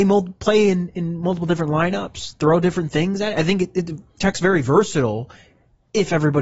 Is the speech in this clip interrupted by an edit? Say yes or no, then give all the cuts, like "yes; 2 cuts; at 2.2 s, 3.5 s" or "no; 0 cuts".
no; 0 cuts